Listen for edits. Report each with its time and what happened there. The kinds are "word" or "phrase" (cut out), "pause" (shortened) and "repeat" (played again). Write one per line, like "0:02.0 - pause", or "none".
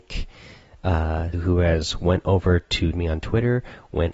0:01.3 - word
0:02.9 - phrase

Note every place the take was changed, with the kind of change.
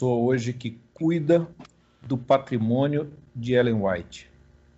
none

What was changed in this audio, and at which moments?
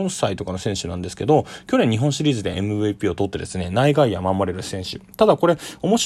none

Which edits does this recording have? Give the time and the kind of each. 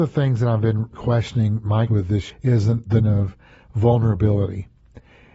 0:00.9 - word
0:01.9 - word
0:02.3 - word
0:03.0 - word

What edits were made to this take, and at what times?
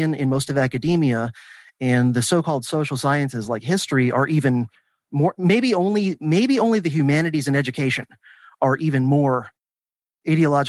none

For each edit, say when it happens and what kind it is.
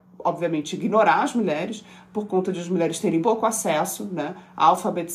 0:03.2 - word

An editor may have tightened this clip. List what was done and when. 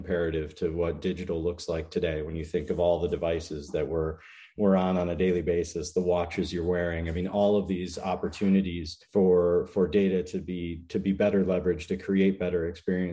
0:09.0 - pause

